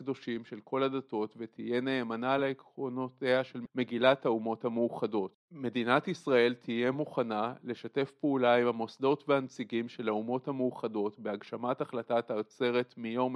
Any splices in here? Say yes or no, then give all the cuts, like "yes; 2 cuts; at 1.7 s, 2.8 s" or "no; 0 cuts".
no; 0 cuts